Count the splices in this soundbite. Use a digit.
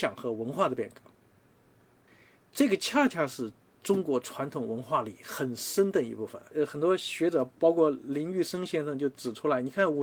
0